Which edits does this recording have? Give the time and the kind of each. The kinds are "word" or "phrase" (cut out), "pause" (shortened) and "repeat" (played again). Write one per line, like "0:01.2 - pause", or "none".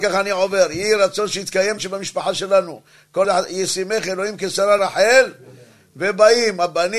0:01.8 - word
0:03.2 - word
0:04.8 - word